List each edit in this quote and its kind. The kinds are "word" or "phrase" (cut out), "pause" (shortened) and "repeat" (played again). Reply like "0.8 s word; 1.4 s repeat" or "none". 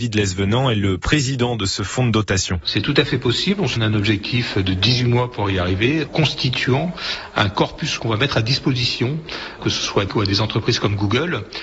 3.8 s word; 6.1 s word; 8.0 s word; 9.6 s word; 10.1 s word